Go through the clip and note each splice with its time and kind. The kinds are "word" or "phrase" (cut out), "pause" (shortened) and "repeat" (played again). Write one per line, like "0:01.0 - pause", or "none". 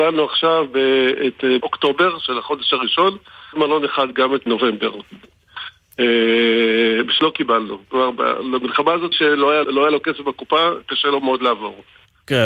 0:01.6 - word
0:03.5 - word
0:04.5 - word
0:07.2 - word
0:09.1 - word
0:09.6 - word